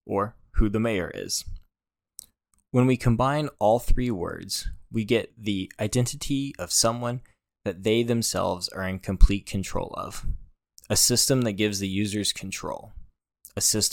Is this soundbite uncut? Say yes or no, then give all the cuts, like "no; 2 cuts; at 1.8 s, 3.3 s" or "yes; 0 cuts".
yes; 0 cuts